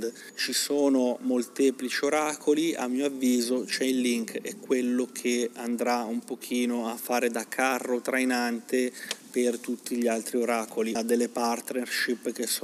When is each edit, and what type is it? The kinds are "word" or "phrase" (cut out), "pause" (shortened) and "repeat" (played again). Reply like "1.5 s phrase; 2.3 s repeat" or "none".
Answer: 10.9 s word